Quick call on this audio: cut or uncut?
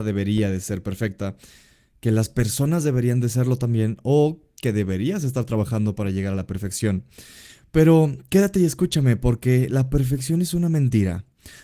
uncut